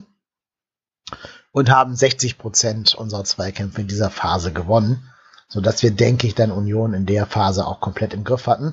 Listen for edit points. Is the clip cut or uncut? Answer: uncut